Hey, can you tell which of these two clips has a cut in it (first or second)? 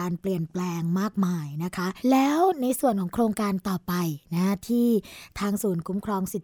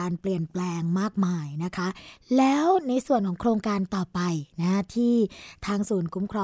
first